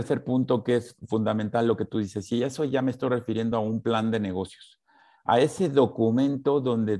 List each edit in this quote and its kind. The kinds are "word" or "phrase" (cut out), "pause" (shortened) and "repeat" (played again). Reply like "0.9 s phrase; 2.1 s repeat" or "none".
none